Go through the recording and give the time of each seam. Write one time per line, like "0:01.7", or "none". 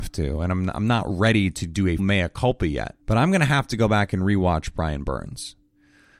0:02.0
0:03.0

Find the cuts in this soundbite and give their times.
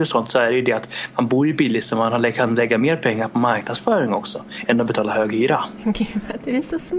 none

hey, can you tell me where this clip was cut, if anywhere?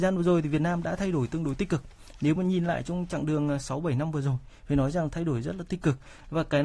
none

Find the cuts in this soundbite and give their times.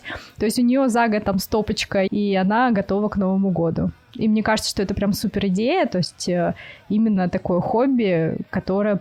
0:01.2
0:02.1

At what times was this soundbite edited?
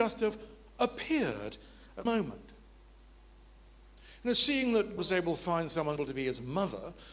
0:02.1
0:05.0
0:06.0

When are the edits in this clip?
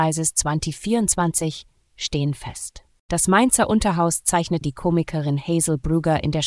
0:04.6

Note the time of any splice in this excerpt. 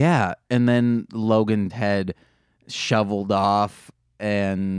0:01.7

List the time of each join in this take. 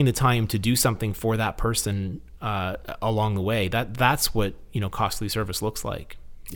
none

